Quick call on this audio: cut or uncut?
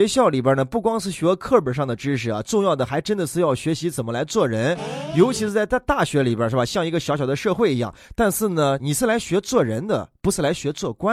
cut